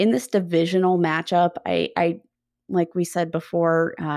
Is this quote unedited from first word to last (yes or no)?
yes